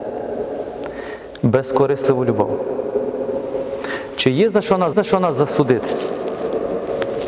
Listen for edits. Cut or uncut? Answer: cut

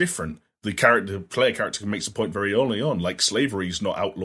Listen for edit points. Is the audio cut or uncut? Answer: uncut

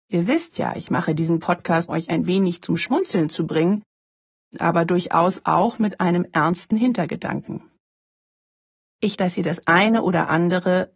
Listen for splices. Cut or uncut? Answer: cut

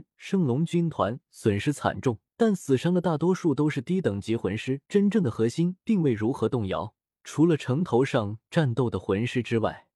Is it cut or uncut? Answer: cut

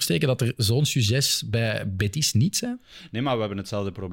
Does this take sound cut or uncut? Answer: uncut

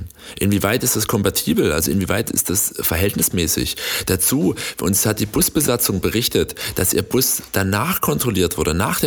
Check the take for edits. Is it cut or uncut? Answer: uncut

